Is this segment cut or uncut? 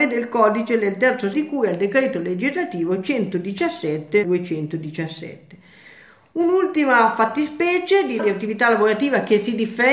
cut